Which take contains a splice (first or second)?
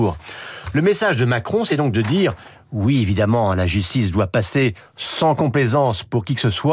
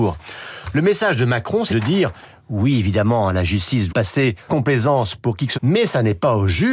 second